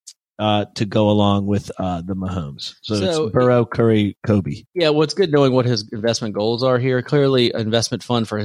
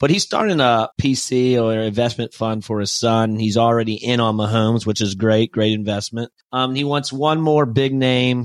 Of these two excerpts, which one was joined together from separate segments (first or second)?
second